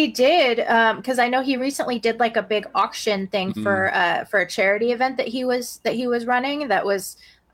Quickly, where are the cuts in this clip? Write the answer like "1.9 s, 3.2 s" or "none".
none

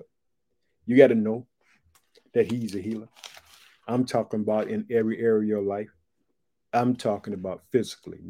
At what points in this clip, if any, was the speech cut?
none

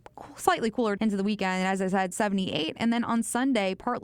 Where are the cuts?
1.0 s, 2.1 s

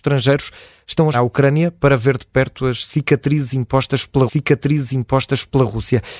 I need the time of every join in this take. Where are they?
1.1 s, 4.3 s

